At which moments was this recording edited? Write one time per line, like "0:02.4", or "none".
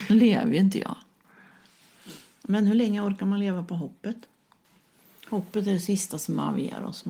none